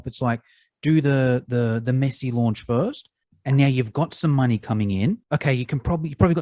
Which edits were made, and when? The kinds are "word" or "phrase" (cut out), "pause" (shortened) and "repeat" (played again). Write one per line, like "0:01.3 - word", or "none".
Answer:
0:05.2 - pause